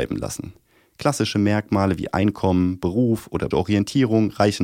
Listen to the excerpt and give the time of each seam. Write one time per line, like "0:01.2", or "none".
0:03.5